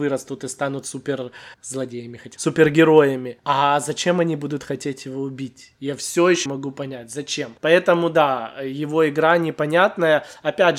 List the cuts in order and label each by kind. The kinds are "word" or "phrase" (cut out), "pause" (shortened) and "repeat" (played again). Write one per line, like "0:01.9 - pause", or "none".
0:01.5 - pause
0:02.4 - word
0:06.5 - word
0:07.6 - pause